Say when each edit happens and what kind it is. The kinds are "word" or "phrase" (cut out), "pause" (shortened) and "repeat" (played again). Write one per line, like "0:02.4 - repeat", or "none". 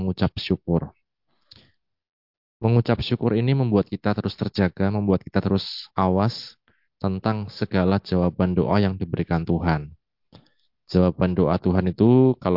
0:05.9 - pause